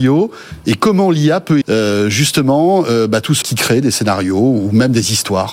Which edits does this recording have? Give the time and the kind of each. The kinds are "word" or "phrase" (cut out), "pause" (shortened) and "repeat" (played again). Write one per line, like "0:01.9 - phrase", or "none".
0:01.6 - word
0:03.4 - word